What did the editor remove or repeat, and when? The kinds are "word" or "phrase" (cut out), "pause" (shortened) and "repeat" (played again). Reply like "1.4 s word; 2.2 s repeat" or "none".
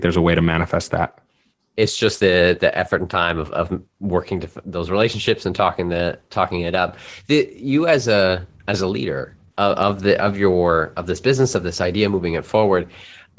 none